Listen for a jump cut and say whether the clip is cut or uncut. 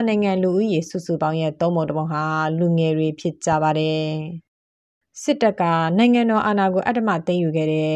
uncut